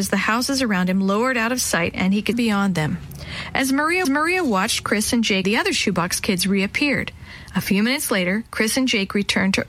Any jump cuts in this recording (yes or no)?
yes